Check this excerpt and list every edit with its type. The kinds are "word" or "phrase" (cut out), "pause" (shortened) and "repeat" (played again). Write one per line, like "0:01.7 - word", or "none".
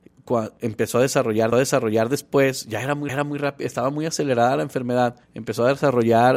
0:01.5 - repeat
0:03.1 - repeat
0:05.2 - pause